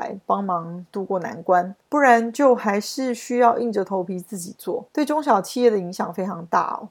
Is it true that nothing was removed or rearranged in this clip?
no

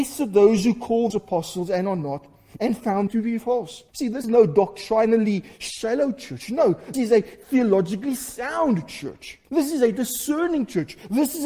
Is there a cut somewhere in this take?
yes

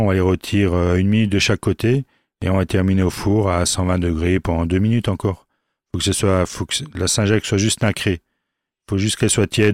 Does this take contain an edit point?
no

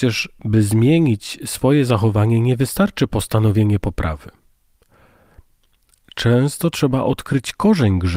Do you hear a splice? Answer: no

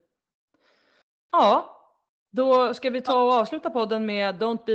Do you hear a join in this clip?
no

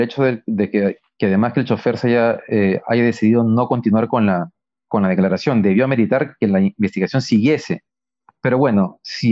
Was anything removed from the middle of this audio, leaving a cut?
no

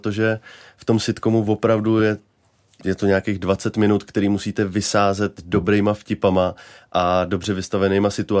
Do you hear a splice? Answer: no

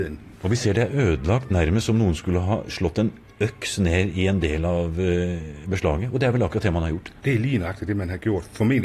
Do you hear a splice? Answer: yes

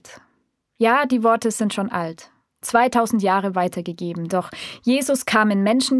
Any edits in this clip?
no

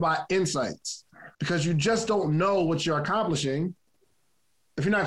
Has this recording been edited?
yes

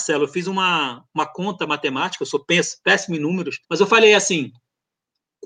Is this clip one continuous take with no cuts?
no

